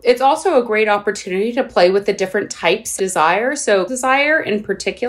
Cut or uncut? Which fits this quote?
cut